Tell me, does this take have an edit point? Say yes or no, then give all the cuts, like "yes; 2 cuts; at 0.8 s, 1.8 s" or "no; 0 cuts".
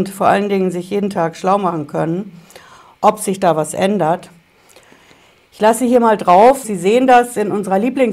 yes; 1 cut; at 6.6 s